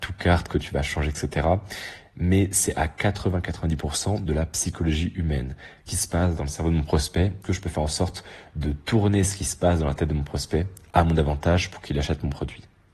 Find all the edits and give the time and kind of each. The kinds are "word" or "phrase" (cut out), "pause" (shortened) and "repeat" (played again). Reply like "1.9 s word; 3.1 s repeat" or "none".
5.9 s word; 7.4 s phrase